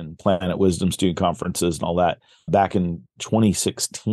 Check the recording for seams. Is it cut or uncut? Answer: cut